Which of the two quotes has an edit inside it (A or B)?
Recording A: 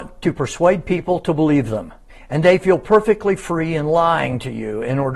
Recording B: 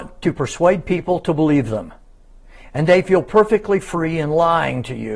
A